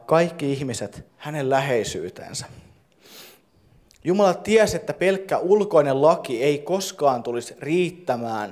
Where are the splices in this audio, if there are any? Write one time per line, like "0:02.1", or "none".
0:01.1